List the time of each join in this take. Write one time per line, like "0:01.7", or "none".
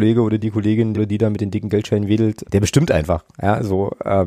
0:00.9
0:02.4